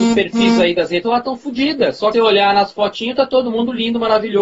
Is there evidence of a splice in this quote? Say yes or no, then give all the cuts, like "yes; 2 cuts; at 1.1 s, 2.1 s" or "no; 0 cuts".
yes; 2 cuts; at 1.0 s, 2.1 s